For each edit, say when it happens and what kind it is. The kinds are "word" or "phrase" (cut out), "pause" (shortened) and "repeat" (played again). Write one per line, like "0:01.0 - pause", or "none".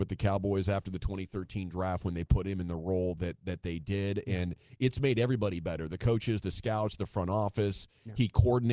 none